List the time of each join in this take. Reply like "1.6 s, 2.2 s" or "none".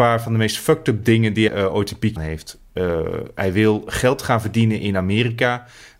1.5 s, 2.2 s